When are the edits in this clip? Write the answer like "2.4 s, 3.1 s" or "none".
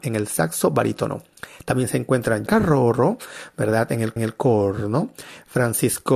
2.5 s, 4.2 s